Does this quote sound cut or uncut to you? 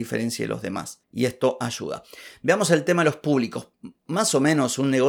uncut